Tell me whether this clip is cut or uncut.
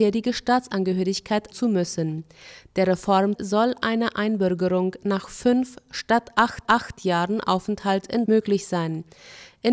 cut